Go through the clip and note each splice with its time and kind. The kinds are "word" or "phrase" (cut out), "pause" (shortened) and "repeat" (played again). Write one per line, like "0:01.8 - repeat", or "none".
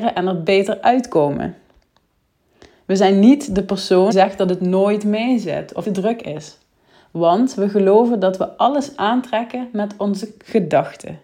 0:04.1 - word
0:05.8 - word

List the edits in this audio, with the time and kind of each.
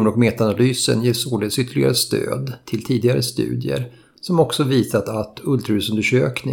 none

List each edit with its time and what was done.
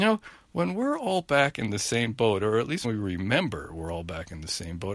0:02.8 - word

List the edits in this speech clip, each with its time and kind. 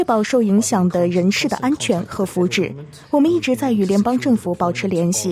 0:03.0 - pause

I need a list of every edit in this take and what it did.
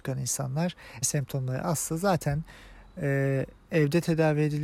0:01.0 - word

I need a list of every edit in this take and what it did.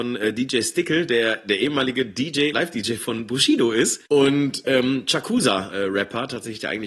0:02.5 - word
0:04.1 - pause
0:05.7 - phrase

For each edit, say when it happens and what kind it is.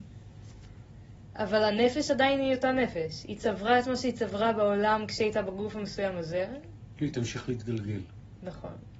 none

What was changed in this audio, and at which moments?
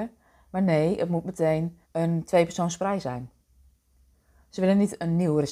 0:01.8 - pause

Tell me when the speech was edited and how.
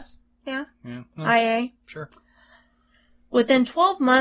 0:01.8 - pause

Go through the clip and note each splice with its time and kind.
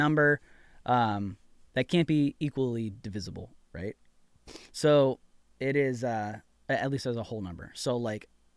none

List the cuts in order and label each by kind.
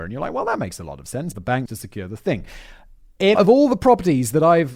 0:01.3 - word
0:01.7 - word
0:03.3 - word

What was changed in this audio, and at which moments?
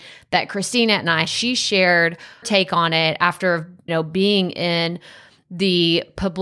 0:01.2 - word
0:02.4 - word
0:03.9 - word

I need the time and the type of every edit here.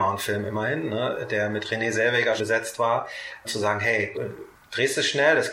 0:02.4 - word
0:03.4 - word
0:04.1 - word

